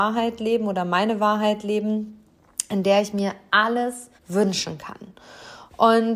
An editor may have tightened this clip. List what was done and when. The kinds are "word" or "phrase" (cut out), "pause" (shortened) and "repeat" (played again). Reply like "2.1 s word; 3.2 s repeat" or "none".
4.2 s pause